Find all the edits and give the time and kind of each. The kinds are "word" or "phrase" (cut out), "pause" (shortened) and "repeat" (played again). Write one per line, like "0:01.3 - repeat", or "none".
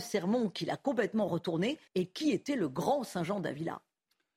0:01.9 - pause